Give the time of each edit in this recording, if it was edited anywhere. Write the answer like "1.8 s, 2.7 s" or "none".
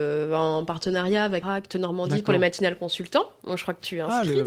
1.4 s